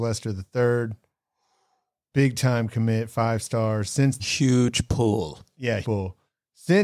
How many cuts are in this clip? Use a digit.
2